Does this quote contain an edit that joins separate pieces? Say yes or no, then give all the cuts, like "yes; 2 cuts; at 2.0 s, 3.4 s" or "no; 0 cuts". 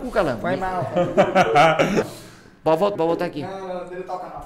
yes; 2 cuts; at 2.0 s, 2.9 s